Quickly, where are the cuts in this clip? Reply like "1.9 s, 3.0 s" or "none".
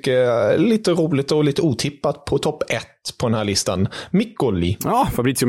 none